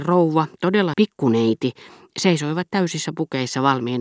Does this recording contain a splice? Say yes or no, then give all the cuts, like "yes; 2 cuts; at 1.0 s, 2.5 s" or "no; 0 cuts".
yes; 1 cut; at 0.9 s